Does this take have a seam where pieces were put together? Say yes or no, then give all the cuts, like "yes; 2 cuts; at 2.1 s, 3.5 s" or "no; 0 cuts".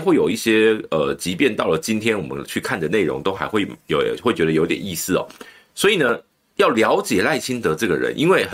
no; 0 cuts